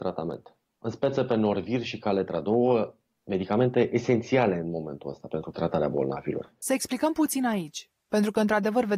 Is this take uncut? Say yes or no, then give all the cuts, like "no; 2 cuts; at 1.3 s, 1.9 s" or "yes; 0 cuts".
yes; 0 cuts